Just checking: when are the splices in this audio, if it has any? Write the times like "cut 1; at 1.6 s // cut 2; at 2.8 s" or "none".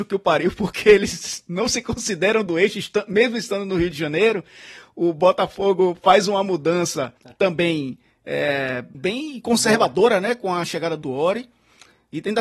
cut 1; at 7.2 s // cut 2; at 8.9 s // cut 3; at 11.0 s